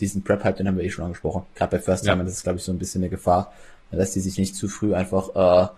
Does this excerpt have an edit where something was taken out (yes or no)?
no